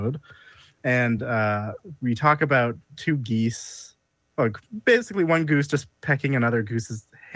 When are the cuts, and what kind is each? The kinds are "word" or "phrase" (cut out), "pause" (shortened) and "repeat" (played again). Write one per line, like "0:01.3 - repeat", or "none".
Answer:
none